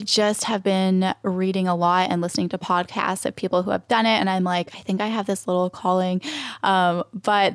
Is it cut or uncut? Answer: uncut